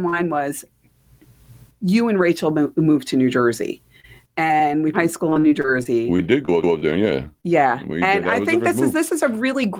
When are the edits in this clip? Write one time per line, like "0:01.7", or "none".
0:04.9
0:06.6